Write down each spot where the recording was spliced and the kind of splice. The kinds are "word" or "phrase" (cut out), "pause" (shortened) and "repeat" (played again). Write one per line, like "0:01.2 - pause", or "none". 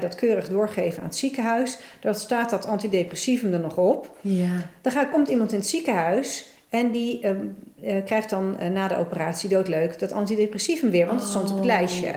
none